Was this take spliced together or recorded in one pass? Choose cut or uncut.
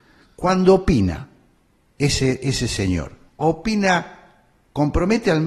cut